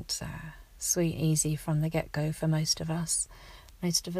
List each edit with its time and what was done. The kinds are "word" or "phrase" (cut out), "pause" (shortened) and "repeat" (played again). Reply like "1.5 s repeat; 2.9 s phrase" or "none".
1.2 s word

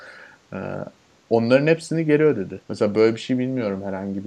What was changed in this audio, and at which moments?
2.6 s pause

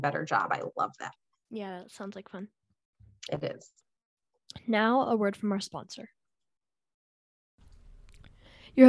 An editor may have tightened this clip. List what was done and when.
none

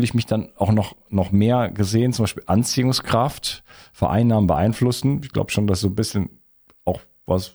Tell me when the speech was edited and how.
none

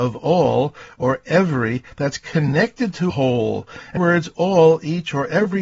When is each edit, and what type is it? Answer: 3.1 s word; 4.0 s word

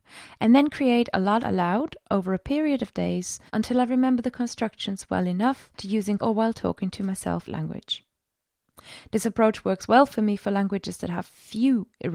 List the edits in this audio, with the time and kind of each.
1.4 s phrase; 3.5 s pause; 5.7 s pause; 6.2 s word; 7.5 s phrase

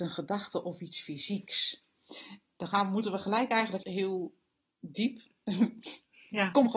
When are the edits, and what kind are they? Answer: 3.8 s word

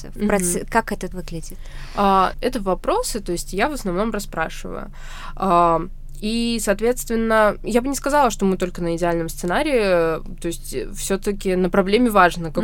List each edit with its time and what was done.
1.1 s word; 2.3 s word

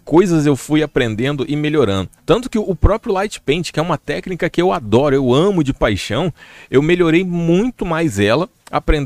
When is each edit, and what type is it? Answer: 2.2 s pause

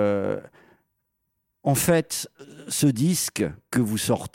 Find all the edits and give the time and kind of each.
none

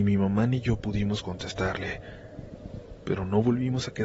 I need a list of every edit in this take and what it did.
none

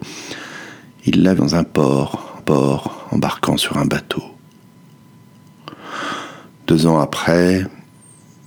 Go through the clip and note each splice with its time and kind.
1.4 s word; 2.4 s repeat

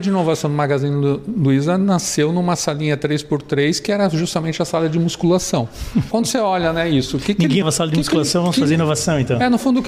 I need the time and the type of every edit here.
6.1 s word; 7.6 s word

